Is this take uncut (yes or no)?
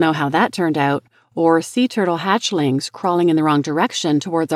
yes